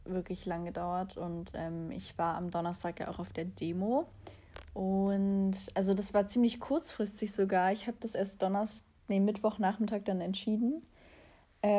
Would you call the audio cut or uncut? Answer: uncut